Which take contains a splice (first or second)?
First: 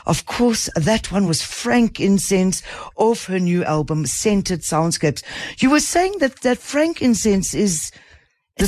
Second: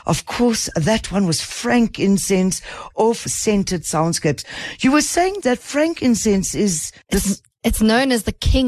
second